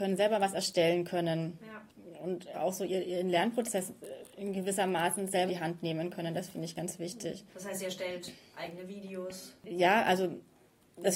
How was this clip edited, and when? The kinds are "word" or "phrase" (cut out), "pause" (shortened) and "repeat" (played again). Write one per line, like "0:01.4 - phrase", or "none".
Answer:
0:02.5 - word
0:05.5 - word